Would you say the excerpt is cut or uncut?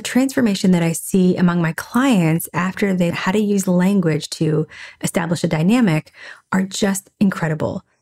cut